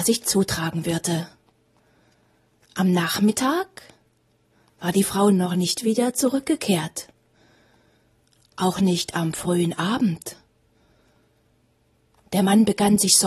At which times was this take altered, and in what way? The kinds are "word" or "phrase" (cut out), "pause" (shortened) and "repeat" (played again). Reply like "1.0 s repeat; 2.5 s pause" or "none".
none